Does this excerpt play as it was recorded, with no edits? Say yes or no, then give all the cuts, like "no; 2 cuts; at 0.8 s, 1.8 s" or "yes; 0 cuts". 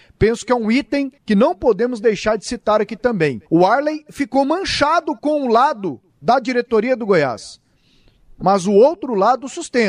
no; 3 cuts; at 1.2 s, 3.5 s, 6.1 s